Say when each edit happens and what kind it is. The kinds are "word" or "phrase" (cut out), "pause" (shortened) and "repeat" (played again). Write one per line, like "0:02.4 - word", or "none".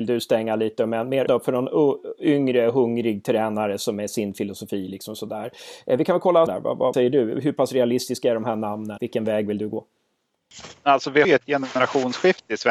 0:01.3 - word
0:06.5 - word
0:06.9 - word
0:09.0 - word
0:11.2 - word